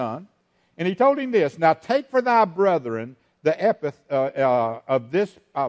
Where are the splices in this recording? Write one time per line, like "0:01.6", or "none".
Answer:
none